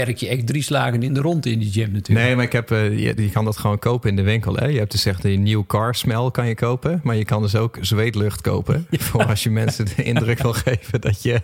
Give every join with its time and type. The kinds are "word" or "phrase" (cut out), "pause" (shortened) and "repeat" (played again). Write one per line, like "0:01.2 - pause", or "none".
none